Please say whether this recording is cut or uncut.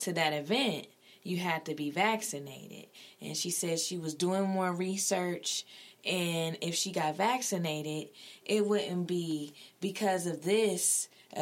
uncut